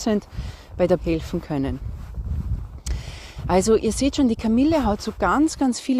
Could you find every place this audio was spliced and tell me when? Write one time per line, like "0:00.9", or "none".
0:01.0